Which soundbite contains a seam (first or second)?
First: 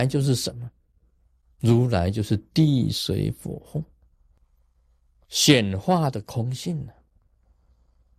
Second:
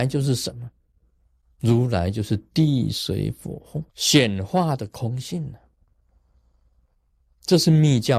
second